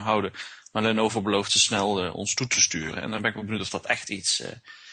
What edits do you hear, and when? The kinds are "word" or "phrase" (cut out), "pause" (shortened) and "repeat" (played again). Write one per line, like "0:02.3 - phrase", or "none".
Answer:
none